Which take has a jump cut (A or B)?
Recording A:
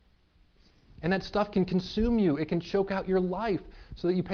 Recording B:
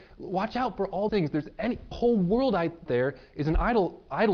B